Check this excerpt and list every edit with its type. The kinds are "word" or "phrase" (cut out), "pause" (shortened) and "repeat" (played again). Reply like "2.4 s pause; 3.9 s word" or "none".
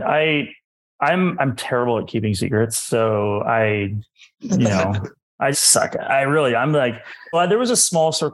5.5 s word; 7.3 s word